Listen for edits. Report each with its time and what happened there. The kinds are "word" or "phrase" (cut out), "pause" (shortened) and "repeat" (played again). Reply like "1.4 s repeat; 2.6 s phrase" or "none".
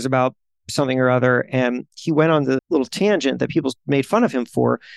2.6 s word